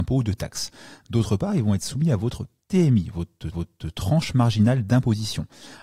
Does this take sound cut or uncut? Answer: cut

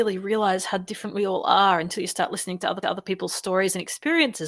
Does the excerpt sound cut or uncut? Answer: cut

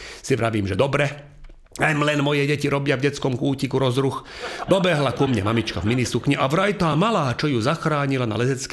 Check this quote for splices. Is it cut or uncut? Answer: uncut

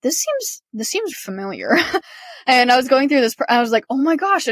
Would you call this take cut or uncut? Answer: cut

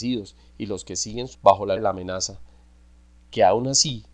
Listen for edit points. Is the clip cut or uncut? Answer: cut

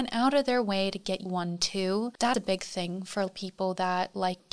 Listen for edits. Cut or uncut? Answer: cut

